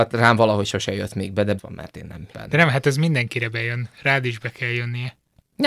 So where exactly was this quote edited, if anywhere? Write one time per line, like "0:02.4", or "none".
0:01.6
0:02.3